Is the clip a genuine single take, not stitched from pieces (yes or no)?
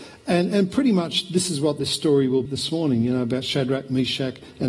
no